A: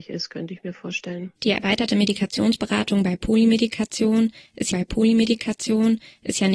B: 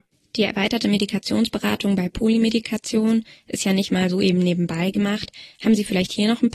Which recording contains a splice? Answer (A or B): A